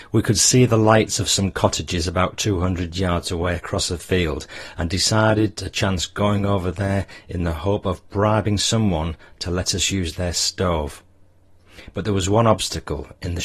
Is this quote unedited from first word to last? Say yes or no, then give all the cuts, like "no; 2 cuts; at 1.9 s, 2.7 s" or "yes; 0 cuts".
yes; 0 cuts